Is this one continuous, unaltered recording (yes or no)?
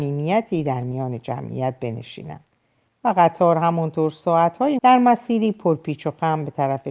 no